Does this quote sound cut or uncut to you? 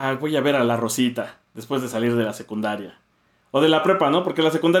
uncut